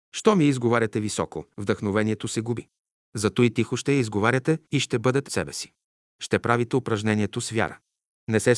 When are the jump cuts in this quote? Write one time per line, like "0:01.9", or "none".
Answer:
0:01.5
0:04.7
0:05.3